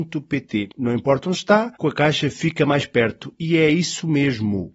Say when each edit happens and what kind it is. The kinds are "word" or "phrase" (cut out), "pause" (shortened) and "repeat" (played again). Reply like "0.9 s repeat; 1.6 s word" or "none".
1.7 s pause

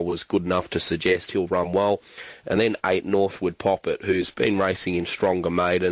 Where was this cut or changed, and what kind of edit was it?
none

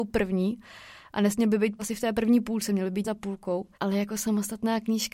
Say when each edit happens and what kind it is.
1.8 s word; 3.0 s word; 3.7 s pause

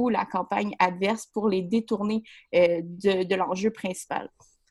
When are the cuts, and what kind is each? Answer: none

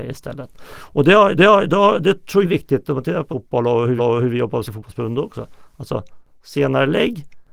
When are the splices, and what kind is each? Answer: 1.4 s repeat; 2.4 s word; 3.3 s word; 4.0 s repeat; 4.7 s word

